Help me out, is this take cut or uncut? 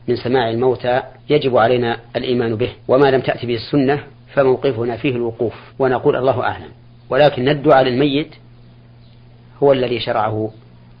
cut